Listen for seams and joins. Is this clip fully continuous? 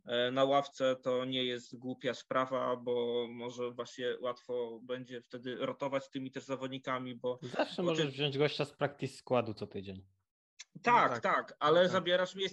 yes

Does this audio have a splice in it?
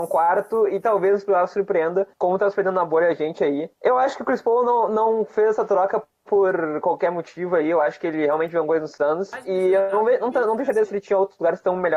yes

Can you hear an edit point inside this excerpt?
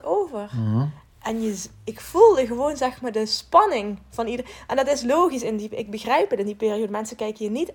no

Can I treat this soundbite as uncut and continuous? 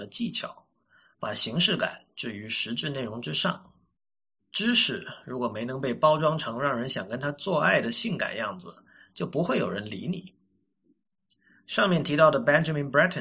yes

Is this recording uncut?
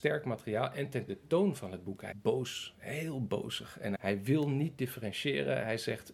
no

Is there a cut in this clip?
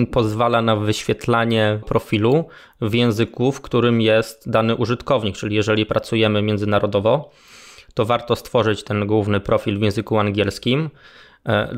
yes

